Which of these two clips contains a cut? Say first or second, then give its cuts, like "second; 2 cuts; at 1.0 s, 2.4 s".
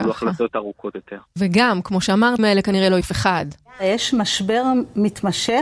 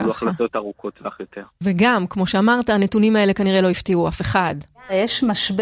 first; 3 cuts; at 0.9 s, 2.4 s, 3.0 s